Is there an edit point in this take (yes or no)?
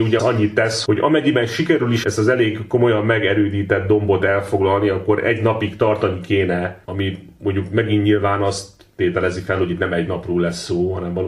yes